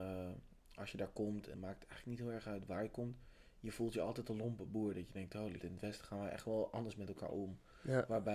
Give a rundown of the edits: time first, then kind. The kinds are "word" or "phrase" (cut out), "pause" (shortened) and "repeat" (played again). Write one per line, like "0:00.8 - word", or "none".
0:01.5 - word
0:05.6 - word